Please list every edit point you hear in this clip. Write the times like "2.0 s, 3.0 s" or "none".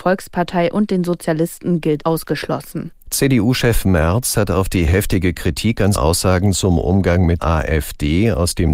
2.0 s, 3.0 s, 5.9 s, 7.4 s

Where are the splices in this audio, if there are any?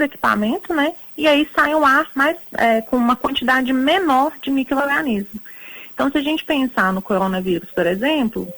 none

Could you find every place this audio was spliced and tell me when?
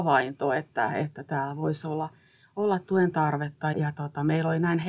3.7 s

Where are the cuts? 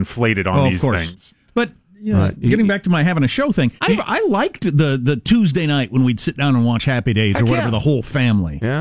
3.8 s

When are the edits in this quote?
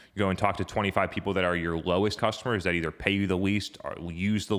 2.2 s

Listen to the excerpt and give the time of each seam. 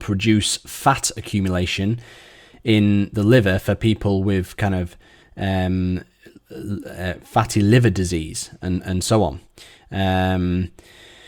none

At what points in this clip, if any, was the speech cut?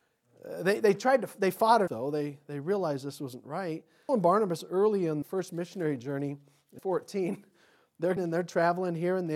1.9 s, 4.1 s, 5.2 s, 6.8 s, 8.2 s

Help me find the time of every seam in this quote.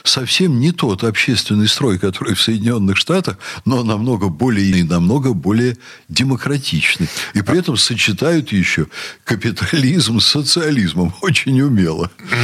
4.7 s

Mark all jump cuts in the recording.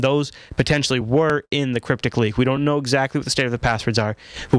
none

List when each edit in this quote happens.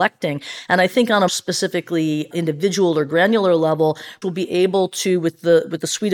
1.3 s, 2.3 s, 4.2 s

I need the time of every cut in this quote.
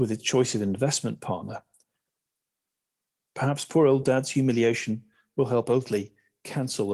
none

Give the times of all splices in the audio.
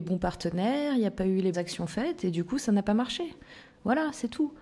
1.5 s

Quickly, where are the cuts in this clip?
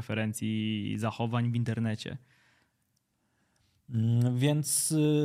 none

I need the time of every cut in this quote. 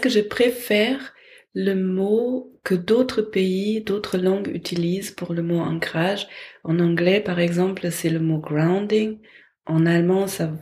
none

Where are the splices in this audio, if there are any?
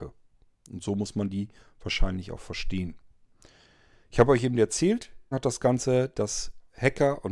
5.3 s

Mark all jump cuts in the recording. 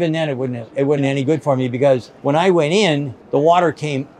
1.0 s, 2.2 s, 3.2 s

